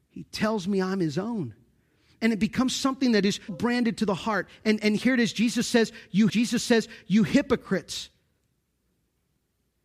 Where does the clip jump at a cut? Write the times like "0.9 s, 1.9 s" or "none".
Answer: 3.5 s, 6.3 s